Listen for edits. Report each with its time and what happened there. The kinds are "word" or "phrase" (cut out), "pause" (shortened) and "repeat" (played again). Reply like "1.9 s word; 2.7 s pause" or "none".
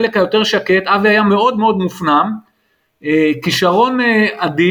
none